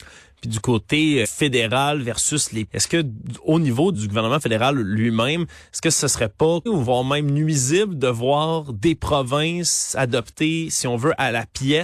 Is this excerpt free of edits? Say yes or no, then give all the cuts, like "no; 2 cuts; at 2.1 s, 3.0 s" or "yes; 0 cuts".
no; 4 cuts; at 1.2 s, 2.7 s, 3.9 s, 6.7 s